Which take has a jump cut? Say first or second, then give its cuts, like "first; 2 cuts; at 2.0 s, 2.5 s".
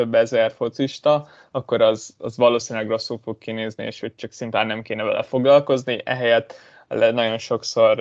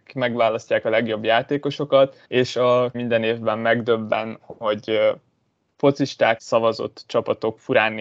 second; 4 cuts; at 2.2 s, 2.9 s, 4.4 s, 6.4 s